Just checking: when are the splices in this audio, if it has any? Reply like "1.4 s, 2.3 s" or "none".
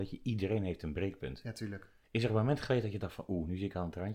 2.0 s